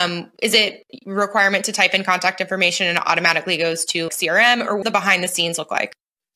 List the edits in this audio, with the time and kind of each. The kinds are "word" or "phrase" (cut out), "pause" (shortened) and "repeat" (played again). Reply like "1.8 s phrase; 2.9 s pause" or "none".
4.1 s word; 4.8 s word